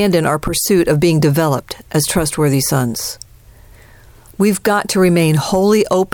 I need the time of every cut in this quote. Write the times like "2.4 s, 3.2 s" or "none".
none